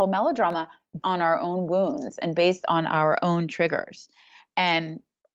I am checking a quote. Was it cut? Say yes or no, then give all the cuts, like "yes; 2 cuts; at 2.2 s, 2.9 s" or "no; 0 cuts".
yes; 1 cut; at 1.0 s